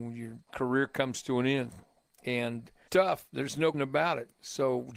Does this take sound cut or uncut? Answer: cut